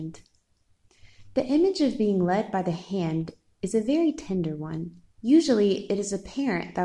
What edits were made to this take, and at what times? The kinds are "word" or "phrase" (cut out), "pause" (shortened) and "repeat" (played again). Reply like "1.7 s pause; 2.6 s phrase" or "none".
5.1 s pause